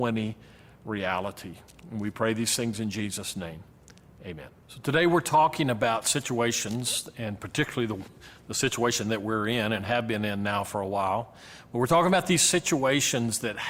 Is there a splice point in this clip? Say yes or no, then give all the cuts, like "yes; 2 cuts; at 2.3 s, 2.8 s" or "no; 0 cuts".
yes; 1 cut; at 4.6 s